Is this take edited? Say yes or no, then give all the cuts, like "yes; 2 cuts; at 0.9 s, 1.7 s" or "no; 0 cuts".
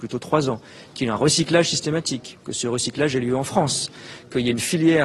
no; 0 cuts